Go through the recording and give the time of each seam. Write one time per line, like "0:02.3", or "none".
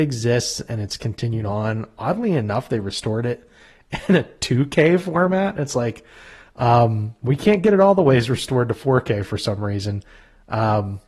none